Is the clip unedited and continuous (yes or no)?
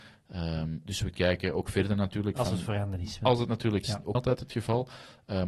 no